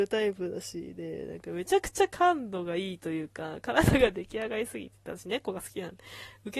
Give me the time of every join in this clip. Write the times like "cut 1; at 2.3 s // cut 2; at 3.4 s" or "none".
none